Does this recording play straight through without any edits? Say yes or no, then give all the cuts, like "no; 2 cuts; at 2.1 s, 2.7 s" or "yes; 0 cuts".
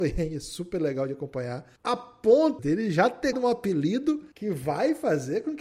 no; 4 cuts; at 1.8 s, 2.6 s, 3.3 s, 4.3 s